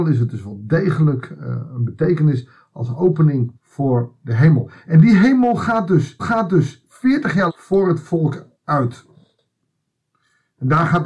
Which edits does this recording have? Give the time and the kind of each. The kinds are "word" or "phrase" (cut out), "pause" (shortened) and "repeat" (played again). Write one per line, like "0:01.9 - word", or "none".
0:03.6 - pause
0:06.2 - repeat
0:07.5 - word
0:08.5 - pause

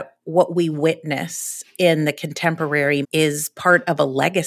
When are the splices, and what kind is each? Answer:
0:03.0 - word

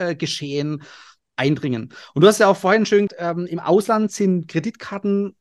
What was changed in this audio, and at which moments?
0:03.1 - word

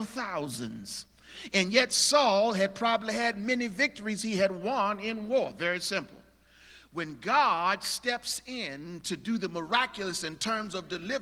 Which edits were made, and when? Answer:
none

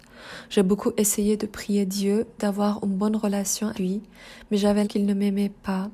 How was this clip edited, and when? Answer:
0:03.7 - word
0:04.8 - word

